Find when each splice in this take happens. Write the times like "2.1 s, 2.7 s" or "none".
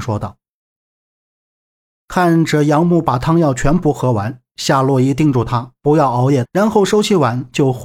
6.4 s

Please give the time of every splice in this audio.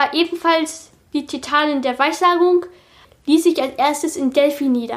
3.0 s

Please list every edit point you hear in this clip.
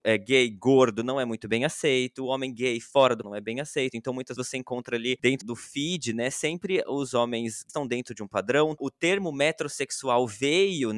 3.2 s, 4.4 s, 5.4 s, 7.7 s

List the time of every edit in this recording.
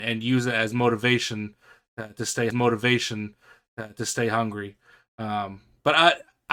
2.5 s

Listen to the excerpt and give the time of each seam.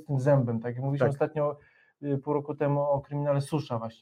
none

